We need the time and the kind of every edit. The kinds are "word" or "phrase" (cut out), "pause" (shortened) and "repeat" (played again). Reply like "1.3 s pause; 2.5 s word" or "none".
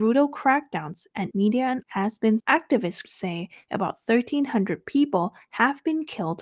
1.3 s word; 1.8 s word; 2.4 s word; 3.0 s word